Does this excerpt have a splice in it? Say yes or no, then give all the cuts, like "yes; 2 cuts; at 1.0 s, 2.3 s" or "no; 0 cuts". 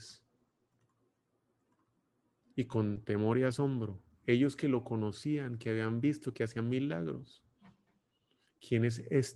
no; 0 cuts